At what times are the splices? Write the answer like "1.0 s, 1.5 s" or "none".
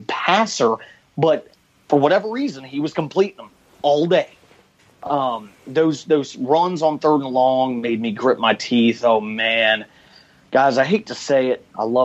none